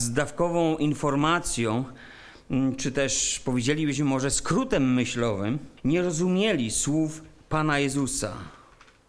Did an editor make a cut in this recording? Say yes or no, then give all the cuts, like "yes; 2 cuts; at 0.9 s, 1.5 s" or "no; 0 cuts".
yes; 1 cut; at 5.8 s